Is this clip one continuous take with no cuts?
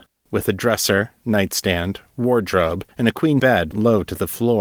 no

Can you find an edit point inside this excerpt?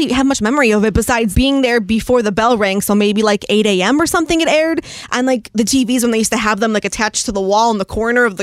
yes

